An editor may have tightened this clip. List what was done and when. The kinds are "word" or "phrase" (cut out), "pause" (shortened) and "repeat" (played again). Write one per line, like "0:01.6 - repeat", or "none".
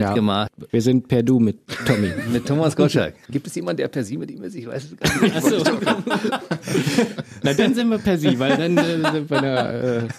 none

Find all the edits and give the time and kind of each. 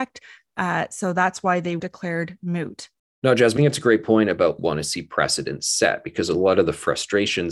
0:01.8 - word
0:03.6 - word
0:04.6 - phrase

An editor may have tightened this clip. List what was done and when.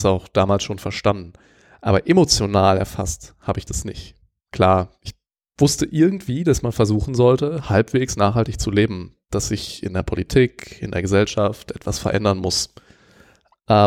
none

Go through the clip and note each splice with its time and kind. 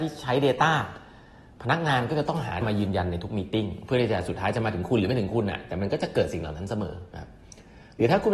0:02.6 - word

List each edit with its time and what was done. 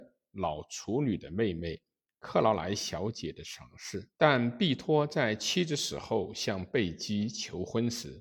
0:04.1 - pause

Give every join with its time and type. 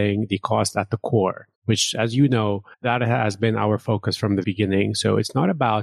0:01.6 - pause
0:02.7 - pause
0:04.4 - word

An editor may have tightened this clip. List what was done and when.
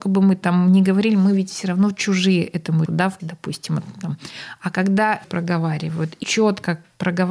0:02.9 - word
0:03.2 - word
0:05.2 - phrase
0:06.2 - word

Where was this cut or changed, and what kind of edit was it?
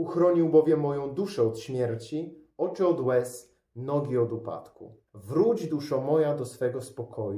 0:05.1 - pause

